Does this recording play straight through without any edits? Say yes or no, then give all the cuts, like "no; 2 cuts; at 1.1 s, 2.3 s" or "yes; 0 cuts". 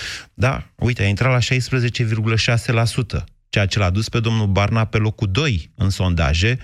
yes; 0 cuts